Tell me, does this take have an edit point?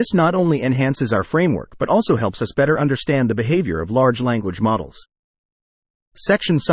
no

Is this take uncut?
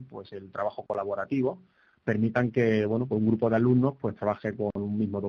yes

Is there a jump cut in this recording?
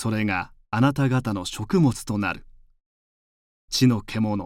no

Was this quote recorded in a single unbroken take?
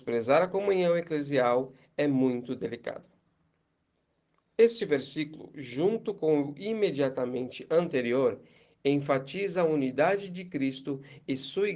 yes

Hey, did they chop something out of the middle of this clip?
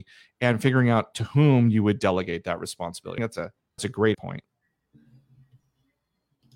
yes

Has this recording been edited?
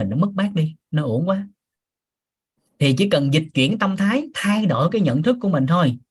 no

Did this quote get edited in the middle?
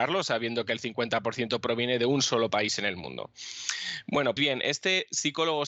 yes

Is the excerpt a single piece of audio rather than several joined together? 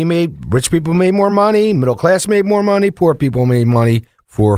yes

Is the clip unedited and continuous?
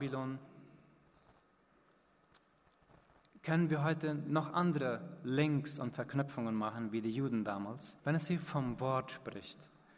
no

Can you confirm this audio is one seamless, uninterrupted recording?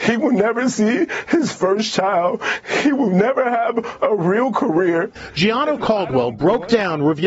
yes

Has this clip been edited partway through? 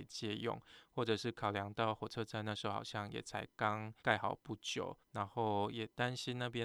yes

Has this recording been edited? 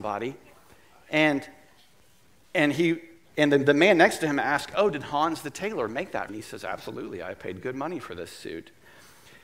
yes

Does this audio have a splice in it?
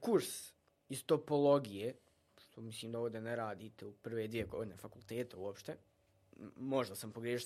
no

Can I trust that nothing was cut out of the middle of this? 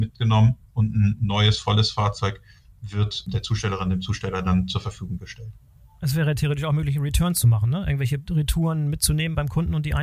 yes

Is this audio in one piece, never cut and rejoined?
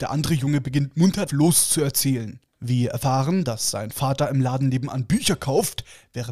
no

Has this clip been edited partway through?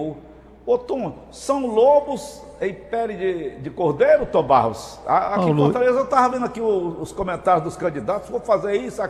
no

